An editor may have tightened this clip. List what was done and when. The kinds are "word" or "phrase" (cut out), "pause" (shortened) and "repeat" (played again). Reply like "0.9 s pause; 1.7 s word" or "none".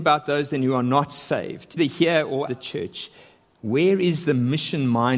1.8 s word; 2.5 s word

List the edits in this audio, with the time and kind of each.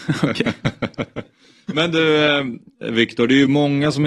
1.6 s pause

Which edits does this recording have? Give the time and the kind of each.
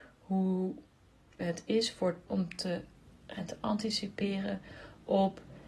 1.4 s word; 2.3 s word; 3.4 s word

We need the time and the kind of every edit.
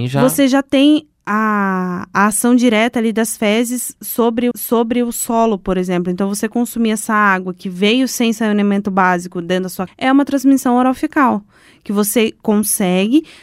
4.5 s repeat; 9.9 s word

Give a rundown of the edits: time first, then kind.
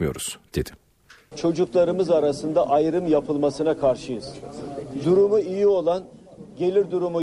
1.3 s word

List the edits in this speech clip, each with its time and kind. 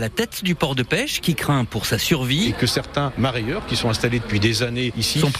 none

